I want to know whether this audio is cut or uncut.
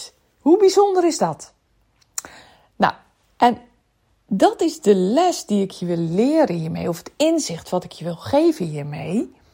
uncut